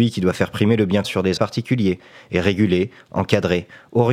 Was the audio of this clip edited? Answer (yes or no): yes